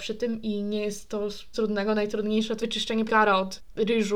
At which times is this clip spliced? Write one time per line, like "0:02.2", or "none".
0:01.5
0:02.6
0:03.1